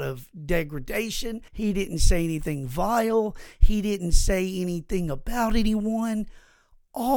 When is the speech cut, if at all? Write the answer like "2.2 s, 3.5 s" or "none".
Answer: 1.5 s